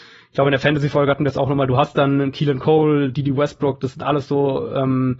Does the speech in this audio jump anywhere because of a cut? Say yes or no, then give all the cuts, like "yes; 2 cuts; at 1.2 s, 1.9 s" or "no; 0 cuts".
no; 0 cuts